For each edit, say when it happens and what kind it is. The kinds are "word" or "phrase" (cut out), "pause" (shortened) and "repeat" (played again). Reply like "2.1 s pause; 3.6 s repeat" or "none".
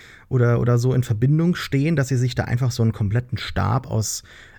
none